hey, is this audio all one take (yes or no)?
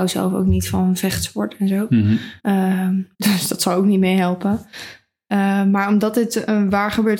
no